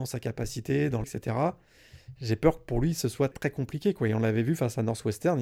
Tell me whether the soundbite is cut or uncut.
cut